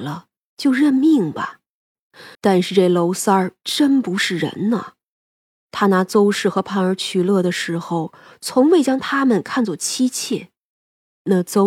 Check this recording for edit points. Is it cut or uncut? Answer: cut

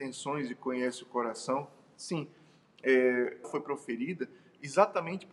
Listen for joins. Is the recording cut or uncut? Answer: cut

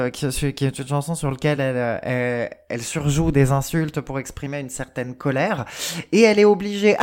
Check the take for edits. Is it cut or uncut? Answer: uncut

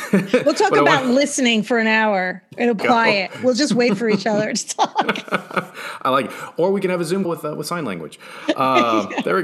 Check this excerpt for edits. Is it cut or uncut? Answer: cut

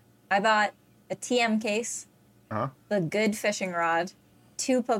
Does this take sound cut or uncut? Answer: uncut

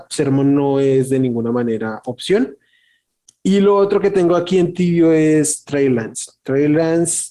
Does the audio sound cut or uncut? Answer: uncut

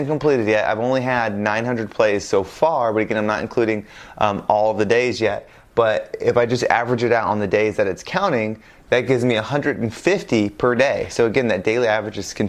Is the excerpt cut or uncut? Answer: uncut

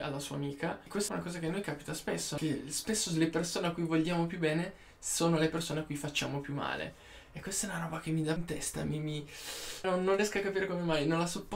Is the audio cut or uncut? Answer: cut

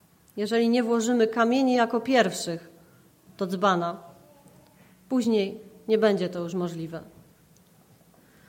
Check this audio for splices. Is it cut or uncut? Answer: uncut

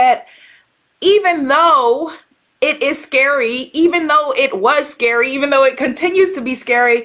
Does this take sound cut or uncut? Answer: uncut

